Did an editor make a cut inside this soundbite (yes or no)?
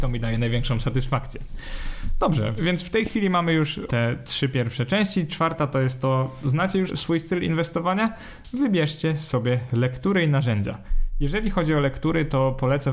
yes